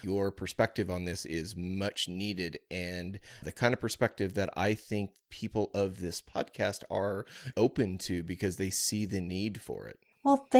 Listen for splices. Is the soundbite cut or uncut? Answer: cut